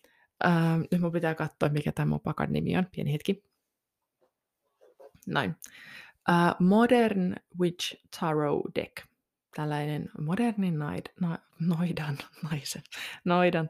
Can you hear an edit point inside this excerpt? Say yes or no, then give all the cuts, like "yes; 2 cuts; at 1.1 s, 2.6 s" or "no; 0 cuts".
no; 0 cuts